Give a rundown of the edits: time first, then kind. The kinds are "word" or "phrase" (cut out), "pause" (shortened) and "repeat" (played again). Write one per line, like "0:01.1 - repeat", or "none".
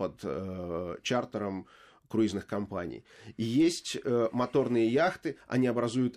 none

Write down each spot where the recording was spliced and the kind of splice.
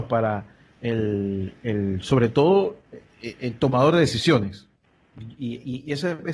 0:03.1 - pause

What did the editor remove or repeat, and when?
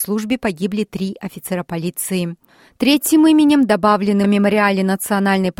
0:04.2 - word

